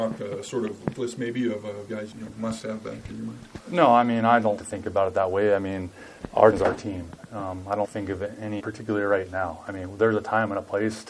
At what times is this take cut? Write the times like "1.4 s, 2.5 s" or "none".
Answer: 0.9 s, 2.1 s, 4.6 s, 6.5 s, 7.8 s, 8.6 s